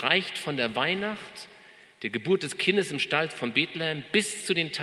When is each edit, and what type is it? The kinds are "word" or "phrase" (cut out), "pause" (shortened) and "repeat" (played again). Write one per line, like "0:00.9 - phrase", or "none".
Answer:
none

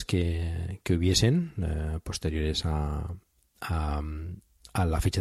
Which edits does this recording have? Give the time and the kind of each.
none

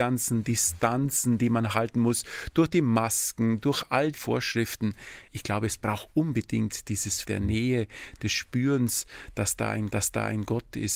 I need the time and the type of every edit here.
0:04.1 - word
0:05.3 - pause
0:07.2 - word
0:09.9 - repeat

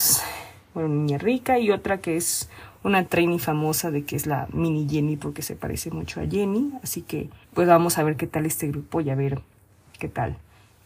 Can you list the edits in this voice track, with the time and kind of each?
0:07.4 - pause

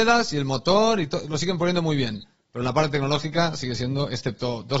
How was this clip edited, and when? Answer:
none

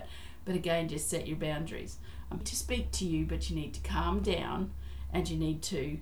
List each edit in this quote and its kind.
0:02.4 - word

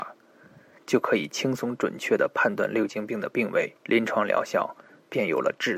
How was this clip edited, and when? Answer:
0:03.8 - pause

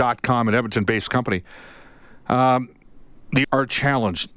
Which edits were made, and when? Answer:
0:03.4 - word

